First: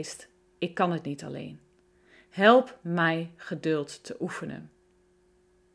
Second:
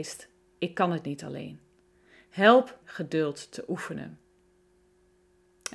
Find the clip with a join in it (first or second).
second